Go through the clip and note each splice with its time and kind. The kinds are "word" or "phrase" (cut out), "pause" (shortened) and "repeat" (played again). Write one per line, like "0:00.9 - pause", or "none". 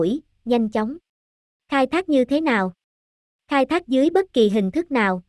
none